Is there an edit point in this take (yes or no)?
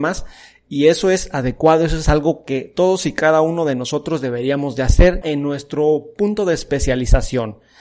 yes